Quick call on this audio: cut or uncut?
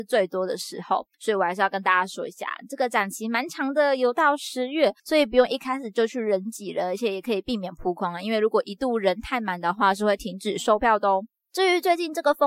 cut